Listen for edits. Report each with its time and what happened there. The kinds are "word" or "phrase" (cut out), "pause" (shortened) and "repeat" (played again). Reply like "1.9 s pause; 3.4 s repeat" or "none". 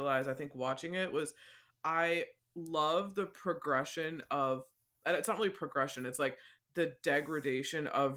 none